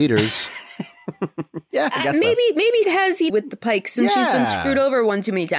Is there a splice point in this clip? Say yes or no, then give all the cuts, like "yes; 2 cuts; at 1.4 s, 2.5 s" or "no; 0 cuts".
yes; 2 cuts; at 2.8 s, 3.3 s